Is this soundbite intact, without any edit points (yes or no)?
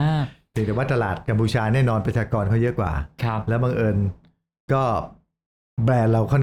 yes